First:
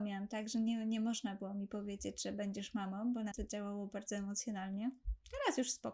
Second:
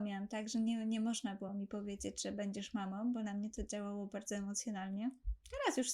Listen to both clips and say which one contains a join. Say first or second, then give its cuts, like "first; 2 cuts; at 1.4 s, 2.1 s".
first; 1 cut; at 3.3 s